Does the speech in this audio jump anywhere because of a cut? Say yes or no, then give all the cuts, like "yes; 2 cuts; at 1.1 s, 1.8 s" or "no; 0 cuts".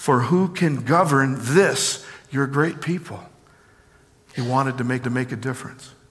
yes; 1 cut; at 5.0 s